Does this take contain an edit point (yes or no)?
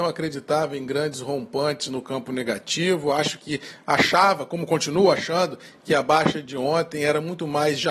no